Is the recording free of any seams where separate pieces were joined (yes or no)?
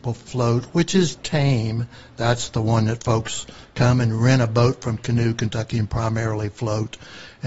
yes